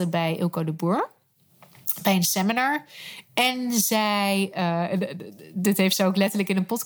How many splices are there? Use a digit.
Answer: 0